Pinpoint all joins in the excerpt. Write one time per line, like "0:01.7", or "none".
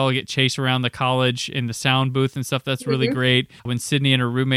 0:03.6